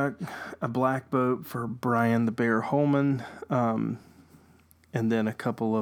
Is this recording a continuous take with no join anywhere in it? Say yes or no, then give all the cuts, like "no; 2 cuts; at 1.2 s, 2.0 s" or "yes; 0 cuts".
yes; 0 cuts